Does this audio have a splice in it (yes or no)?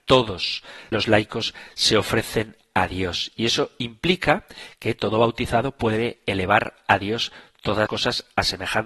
yes